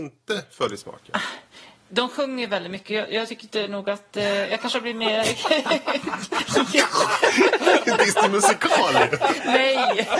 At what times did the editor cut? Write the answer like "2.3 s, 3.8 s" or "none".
none